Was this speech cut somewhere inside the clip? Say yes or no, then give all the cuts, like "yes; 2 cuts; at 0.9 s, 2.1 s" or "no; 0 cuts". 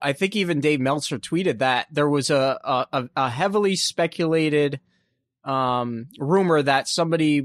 no; 0 cuts